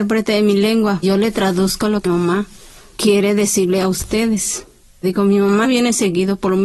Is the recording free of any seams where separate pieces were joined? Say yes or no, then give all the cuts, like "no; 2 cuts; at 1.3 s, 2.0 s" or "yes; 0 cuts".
no; 4 cuts; at 1.0 s, 2.0 s, 5.0 s, 5.6 s